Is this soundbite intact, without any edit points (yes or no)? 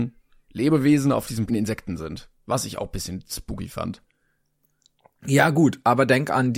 no